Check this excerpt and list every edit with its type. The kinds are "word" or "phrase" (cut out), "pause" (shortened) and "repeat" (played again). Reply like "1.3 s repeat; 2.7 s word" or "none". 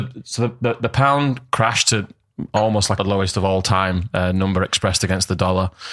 3.0 s word